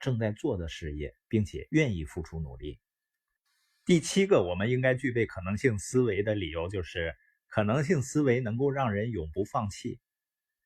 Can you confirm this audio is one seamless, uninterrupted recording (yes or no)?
yes